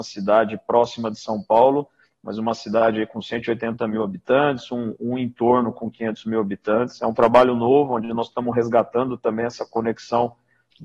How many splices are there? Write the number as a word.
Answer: zero